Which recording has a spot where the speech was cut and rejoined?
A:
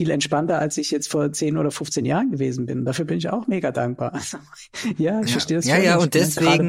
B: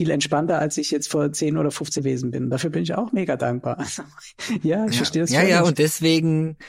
B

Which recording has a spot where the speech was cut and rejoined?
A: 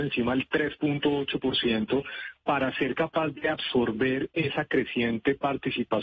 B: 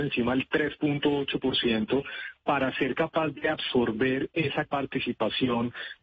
B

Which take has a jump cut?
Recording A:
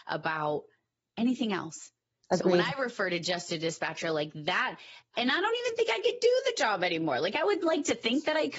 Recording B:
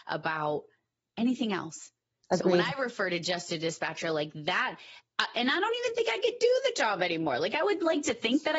A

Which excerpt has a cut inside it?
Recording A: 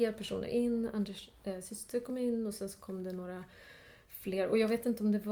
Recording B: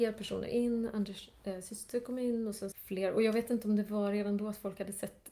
B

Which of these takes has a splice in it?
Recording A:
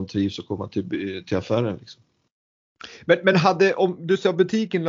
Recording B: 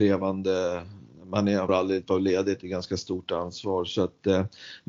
B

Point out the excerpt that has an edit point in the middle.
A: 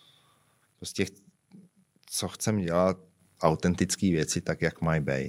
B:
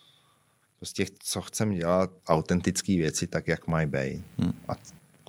B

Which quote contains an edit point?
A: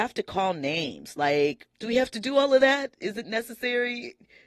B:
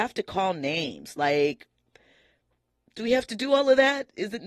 A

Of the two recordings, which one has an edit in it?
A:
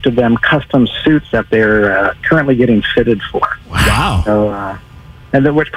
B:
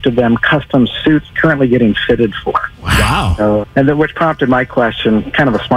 B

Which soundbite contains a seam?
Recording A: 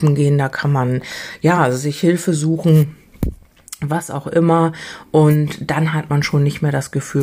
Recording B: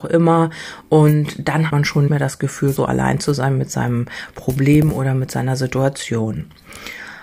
B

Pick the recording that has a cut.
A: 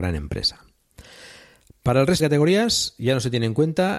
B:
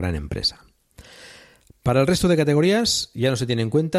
A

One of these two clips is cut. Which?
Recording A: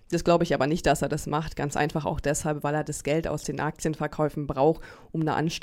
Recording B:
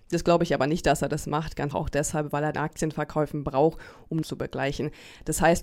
B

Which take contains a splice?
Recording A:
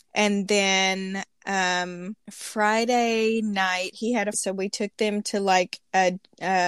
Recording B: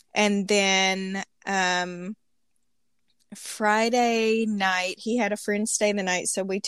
A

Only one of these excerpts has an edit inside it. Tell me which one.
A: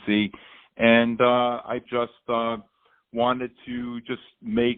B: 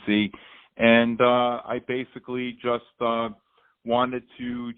A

